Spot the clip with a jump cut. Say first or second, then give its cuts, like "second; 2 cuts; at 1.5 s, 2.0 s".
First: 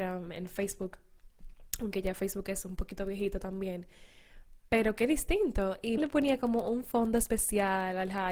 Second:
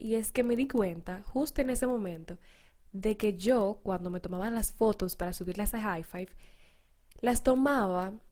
first; 1 cut; at 6.0 s